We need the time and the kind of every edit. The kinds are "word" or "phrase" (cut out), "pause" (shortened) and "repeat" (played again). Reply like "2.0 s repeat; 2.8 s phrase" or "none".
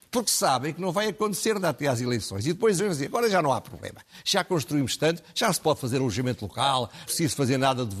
1.6 s word; 2.8 s word; 7.1 s phrase